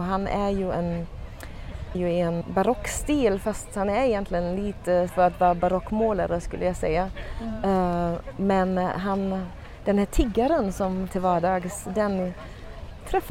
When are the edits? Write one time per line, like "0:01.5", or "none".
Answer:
0:01.9
0:02.4
0:05.1
0:11.1